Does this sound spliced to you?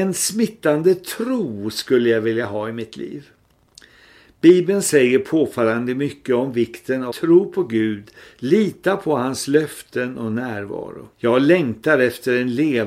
yes; 2 cuts; at 7.1 s, 11.1 s

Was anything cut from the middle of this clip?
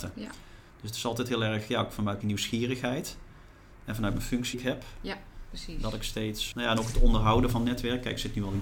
yes; 3 cuts; at 2.2 s, 4.5 s, 6.5 s

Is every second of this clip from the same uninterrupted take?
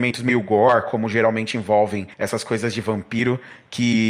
no; 1 cut; at 2.1 s

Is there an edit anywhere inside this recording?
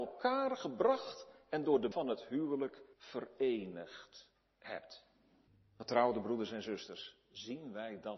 yes; 3 cuts; at 1.9 s, 2.9 s, 5.5 s

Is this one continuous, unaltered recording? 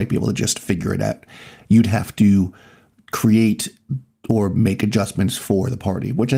yes; 0 cuts

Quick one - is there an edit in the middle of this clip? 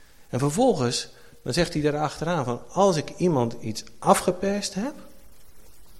no; 0 cuts

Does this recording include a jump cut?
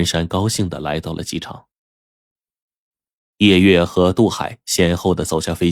no; 0 cuts

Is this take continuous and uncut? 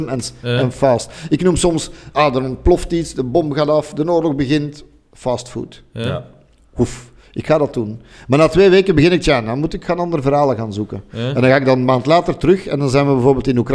yes; 0 cuts

